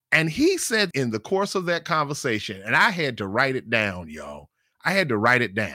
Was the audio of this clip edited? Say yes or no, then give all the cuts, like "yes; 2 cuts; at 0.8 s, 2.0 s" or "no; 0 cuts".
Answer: yes; 1 cut; at 0.9 s